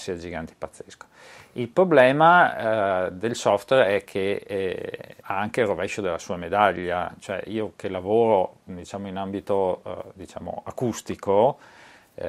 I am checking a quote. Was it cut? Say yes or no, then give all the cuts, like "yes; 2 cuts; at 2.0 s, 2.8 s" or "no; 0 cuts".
yes; 1 cut; at 5.2 s